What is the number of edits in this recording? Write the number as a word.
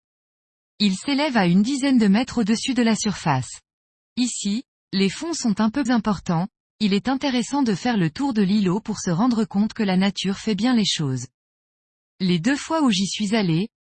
one